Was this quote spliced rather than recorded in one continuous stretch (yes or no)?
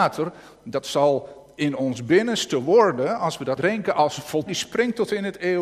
yes